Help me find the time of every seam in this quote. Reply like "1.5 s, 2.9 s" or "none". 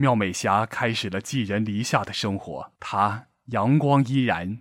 2.8 s